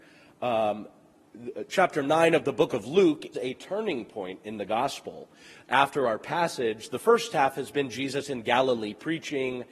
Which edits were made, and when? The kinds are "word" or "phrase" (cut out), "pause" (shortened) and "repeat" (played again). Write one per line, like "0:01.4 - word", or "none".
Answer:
0:03.3 - word

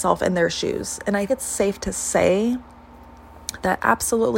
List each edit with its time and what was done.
0:01.3 - word

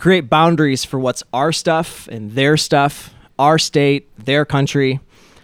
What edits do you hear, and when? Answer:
none

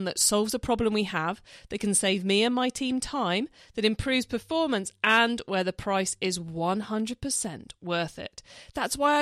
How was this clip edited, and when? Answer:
none

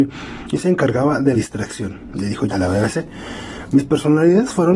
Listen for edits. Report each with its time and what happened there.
0:01.3 - word
0:02.5 - word

